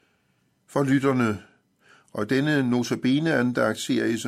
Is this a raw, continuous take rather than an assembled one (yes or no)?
yes